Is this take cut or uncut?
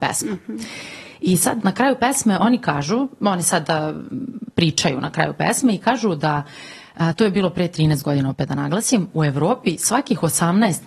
uncut